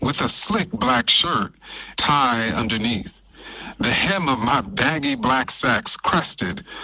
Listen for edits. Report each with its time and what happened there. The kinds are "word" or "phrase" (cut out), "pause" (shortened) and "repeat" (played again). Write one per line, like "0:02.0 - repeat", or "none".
0:01.9 - phrase

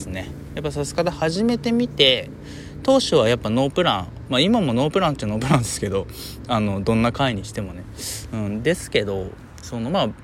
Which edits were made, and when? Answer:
none

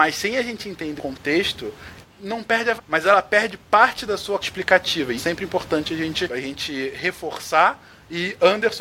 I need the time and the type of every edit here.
0:01.0 - word
0:02.0 - word
0:02.8 - word
0:04.4 - word
0:05.2 - word
0:06.3 - word

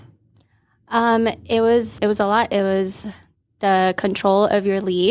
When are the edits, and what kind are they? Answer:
0:02.0 - word

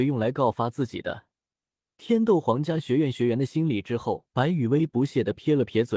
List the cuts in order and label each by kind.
0:04.3 - pause

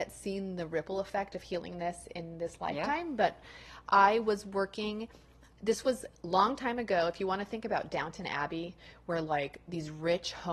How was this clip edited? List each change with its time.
none

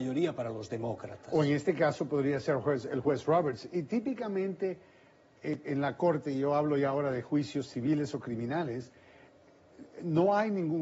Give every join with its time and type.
none

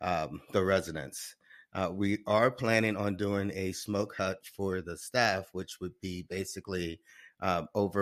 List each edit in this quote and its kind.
none

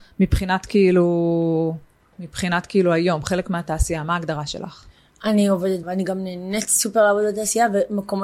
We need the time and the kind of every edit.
0:02.1 - word
0:05.8 - word

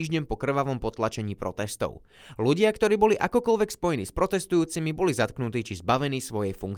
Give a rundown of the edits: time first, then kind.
none

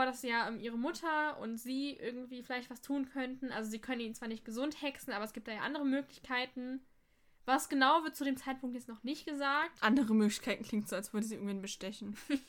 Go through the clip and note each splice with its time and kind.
none

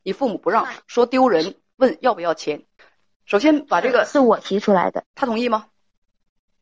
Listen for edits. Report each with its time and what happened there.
0:02.8 - pause
0:05.1 - pause

